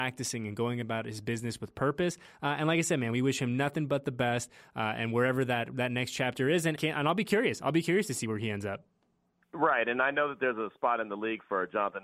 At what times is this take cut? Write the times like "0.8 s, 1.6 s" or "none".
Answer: 6.8 s